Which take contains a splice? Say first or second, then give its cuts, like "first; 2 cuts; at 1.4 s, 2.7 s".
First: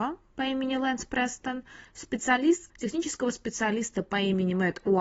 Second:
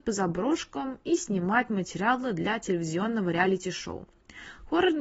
first; 1 cut; at 2.7 s